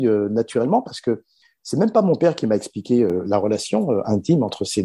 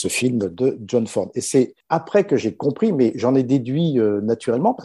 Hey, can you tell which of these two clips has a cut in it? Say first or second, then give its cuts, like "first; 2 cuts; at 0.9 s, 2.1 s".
second; 1 cut; at 1.8 s